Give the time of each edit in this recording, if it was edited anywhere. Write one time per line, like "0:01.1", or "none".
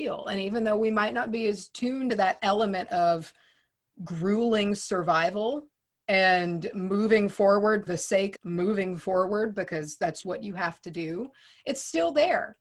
0:02.1
0:07.9
0:08.4
0:10.2